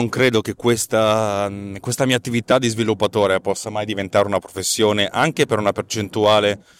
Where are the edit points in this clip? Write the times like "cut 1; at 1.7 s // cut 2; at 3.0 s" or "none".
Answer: none